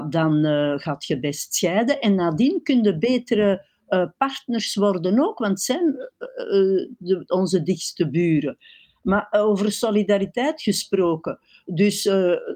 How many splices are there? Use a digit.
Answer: 0